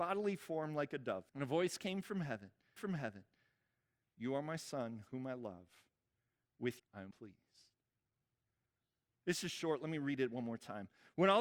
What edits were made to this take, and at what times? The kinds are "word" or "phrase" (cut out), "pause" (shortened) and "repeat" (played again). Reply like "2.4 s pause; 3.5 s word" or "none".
1.3 s pause; 2.8 s repeat; 6.8 s word; 7.1 s word